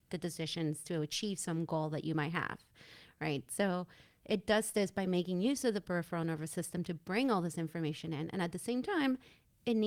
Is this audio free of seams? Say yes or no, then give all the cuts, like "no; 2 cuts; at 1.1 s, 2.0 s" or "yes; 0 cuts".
yes; 0 cuts